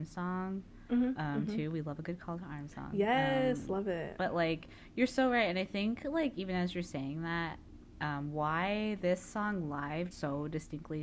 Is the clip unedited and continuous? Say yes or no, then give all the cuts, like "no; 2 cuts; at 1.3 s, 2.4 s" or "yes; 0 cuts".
no; 1 cut; at 10.1 s